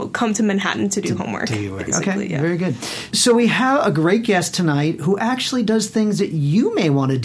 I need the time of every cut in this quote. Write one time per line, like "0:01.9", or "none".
none